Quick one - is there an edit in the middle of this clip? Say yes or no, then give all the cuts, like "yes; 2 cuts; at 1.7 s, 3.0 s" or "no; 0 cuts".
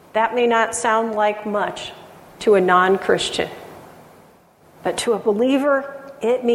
no; 0 cuts